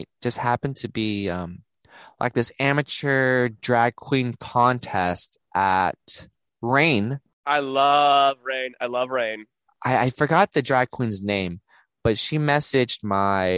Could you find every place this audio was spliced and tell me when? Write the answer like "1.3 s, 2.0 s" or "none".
none